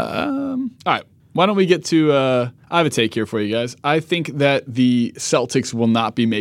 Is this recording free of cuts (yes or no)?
no